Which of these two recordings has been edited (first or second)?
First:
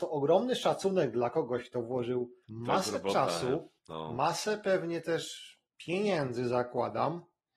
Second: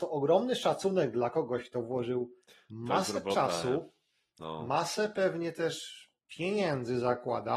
first